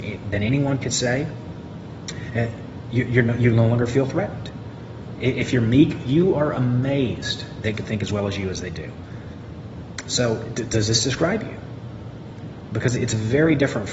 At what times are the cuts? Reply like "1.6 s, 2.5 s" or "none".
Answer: 7.7 s